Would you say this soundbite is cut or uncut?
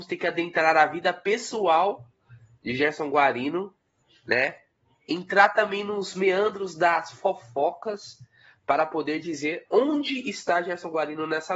uncut